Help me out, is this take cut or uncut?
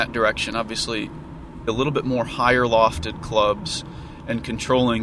cut